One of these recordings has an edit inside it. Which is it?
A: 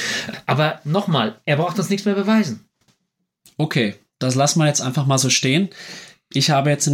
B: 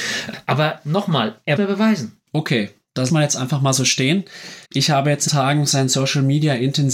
B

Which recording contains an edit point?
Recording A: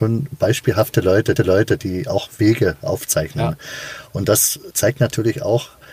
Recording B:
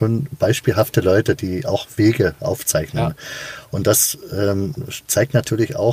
A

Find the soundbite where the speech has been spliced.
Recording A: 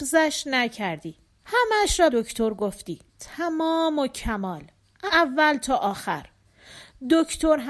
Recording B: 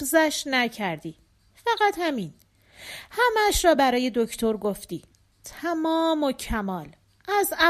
A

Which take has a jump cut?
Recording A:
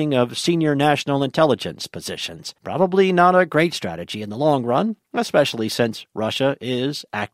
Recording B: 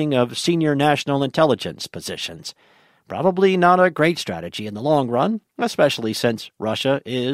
A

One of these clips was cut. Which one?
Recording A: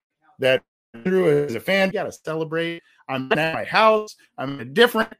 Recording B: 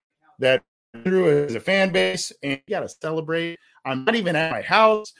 A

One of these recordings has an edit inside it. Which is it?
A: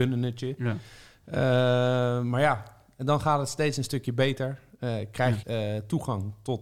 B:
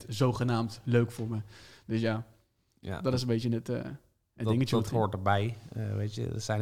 A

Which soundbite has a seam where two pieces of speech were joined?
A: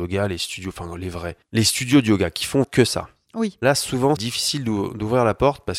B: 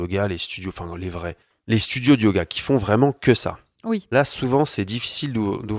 A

